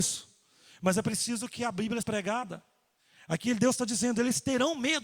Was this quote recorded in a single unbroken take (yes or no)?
no